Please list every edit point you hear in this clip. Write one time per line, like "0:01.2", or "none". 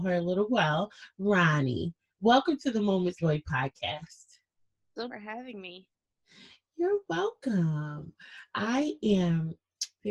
0:03.2
0:05.1